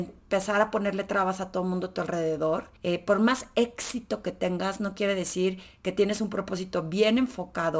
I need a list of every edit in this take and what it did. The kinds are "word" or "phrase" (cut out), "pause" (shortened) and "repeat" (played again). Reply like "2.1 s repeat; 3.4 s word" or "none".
2.8 s pause